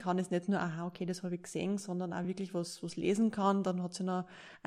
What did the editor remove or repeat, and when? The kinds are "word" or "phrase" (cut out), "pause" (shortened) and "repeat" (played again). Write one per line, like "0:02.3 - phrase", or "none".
none